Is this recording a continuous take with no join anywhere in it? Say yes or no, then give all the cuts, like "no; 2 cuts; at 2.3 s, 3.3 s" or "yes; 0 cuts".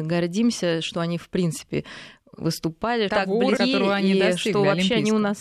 no; 2 cuts; at 3.1 s, 3.6 s